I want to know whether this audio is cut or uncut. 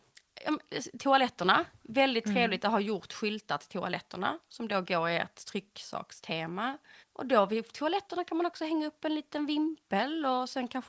cut